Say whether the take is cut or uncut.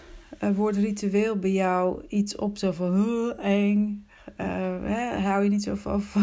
uncut